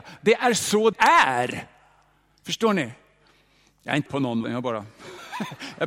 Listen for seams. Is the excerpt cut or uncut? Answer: cut